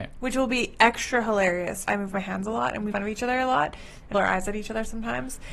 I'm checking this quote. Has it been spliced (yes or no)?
yes